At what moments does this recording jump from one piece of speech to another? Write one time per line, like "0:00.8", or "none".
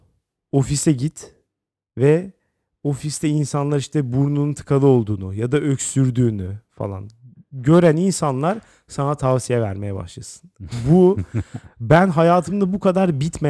none